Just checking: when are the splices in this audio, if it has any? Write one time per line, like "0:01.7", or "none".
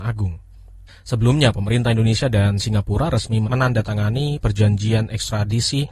none